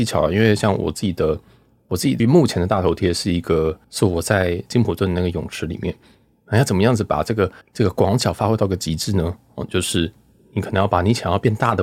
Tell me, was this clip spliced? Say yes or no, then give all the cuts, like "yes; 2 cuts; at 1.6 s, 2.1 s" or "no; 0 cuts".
yes; 3 cuts; at 2.2 s, 3.8 s, 7.6 s